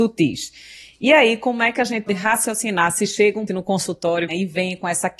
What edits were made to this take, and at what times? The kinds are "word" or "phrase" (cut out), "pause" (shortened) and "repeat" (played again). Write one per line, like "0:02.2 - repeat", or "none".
0:02.1 - word
0:03.5 - word
0:04.3 - word